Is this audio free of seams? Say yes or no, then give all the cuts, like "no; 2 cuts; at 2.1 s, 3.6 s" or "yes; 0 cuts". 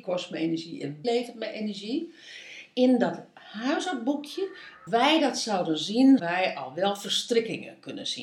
no; 3 cuts; at 1.0 s, 4.9 s, 6.2 s